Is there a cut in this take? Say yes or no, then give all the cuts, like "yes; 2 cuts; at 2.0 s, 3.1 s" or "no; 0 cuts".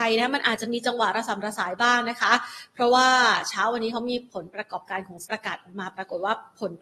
yes; 1 cut; at 5.3 s